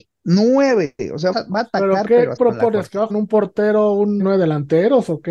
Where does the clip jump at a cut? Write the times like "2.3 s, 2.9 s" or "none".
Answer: 1.3 s, 2.4 s, 3.1 s, 4.2 s